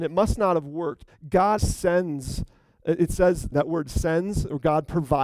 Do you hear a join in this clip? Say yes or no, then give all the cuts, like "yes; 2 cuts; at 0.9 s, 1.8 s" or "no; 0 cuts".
yes; 3 cuts; at 1.1 s, 1.6 s, 3.5 s